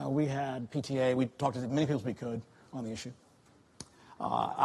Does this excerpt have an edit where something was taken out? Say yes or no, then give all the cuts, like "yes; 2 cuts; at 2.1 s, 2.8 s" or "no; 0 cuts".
no; 0 cuts